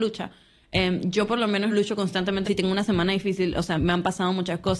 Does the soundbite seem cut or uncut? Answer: cut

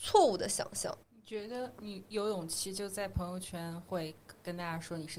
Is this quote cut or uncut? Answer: cut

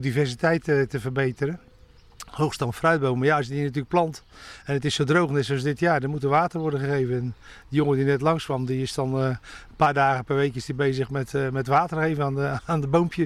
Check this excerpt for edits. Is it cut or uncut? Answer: uncut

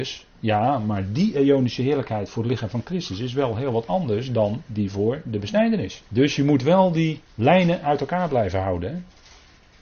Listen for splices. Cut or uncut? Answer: cut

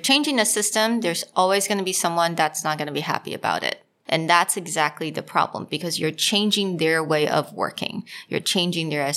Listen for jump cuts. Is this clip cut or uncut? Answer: uncut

